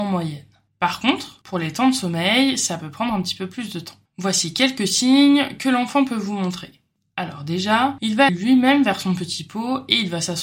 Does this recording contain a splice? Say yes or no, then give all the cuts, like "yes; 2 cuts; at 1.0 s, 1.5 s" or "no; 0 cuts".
yes; 2 cuts; at 1.4 s, 8.3 s